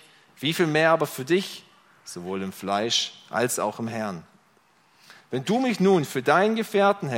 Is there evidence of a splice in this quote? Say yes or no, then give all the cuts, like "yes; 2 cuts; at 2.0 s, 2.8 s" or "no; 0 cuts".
no; 0 cuts